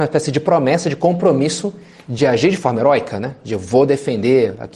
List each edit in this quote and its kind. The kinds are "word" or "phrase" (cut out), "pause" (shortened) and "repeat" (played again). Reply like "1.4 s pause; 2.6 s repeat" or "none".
none